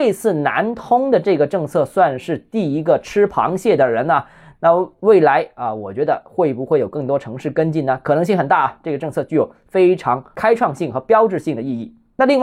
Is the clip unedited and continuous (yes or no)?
yes